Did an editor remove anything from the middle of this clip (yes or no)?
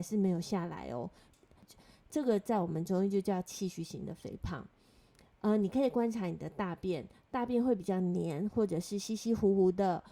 no